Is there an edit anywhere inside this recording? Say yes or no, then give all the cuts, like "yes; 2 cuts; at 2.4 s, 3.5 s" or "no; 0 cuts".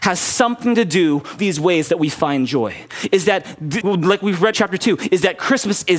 yes; 3 cuts; at 1.4 s, 3.8 s, 4.5 s